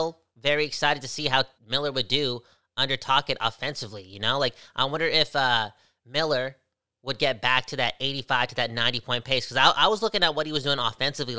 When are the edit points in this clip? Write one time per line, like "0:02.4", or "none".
0:01.6